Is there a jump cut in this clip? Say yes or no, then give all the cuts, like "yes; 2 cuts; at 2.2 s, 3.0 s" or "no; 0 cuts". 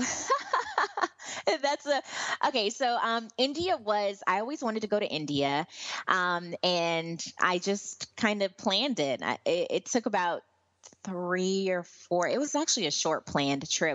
yes; 1 cut; at 10.9 s